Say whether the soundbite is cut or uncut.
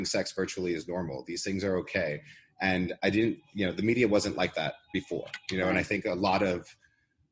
uncut